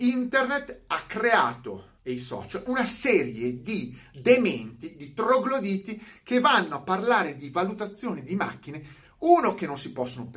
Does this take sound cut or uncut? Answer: cut